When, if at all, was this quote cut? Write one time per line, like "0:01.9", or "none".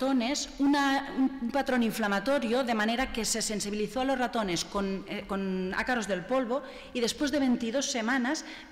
none